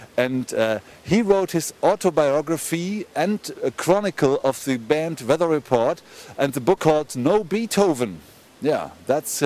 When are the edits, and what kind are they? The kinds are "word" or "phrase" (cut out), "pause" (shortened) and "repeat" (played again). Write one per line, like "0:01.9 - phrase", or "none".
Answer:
0:03.5 - word
0:06.8 - word